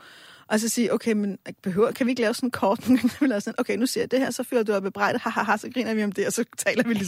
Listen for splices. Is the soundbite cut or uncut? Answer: uncut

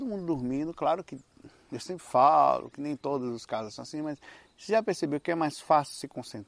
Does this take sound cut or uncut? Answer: uncut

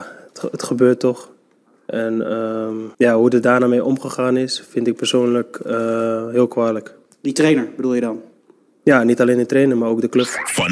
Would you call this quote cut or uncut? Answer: cut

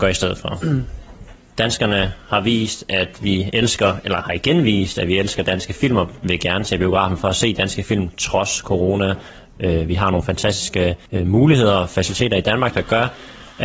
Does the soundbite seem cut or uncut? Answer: cut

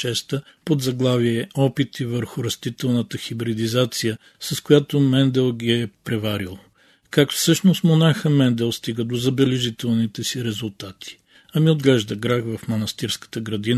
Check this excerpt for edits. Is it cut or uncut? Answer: uncut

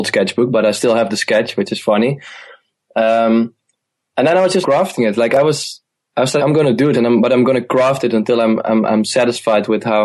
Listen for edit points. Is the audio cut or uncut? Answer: cut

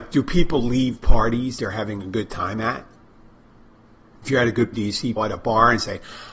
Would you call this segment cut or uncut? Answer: cut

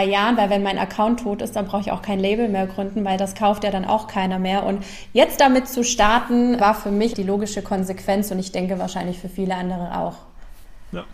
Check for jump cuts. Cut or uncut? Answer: cut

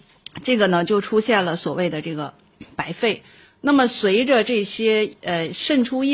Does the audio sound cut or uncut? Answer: uncut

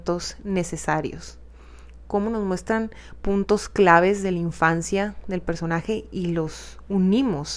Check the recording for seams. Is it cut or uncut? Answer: uncut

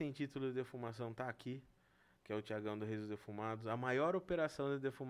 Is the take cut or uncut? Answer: uncut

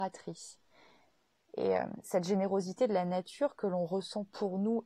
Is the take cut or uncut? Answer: uncut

